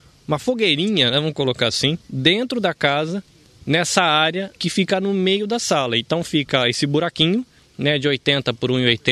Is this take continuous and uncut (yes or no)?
no